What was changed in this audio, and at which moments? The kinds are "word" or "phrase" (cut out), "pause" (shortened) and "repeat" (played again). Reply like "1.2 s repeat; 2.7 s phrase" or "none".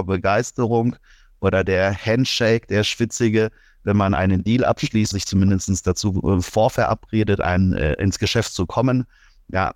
5.1 s word